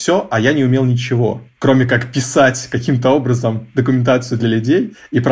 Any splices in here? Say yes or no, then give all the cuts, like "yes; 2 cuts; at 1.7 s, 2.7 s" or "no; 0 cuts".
no; 0 cuts